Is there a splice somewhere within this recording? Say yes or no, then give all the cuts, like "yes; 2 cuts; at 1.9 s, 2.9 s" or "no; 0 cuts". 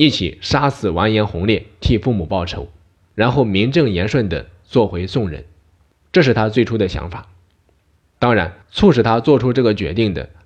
yes; 1 cut; at 8.6 s